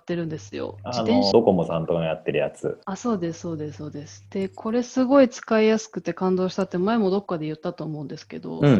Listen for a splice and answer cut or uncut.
cut